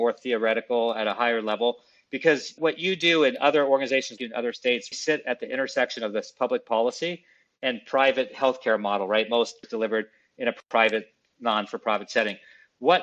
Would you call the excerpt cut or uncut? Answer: cut